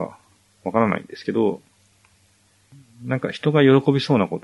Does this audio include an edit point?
no; 0 cuts

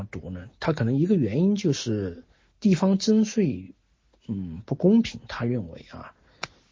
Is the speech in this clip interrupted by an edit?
no; 0 cuts

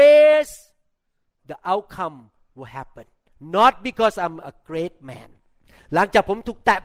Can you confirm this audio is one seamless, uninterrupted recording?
yes; 0 cuts

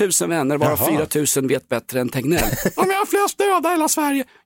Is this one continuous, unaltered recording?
yes; 0 cuts

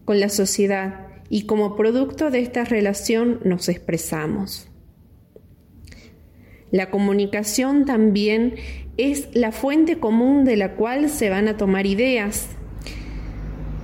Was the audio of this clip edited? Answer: no; 0 cuts

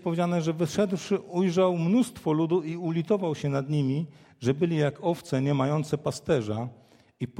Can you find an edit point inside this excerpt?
no; 0 cuts

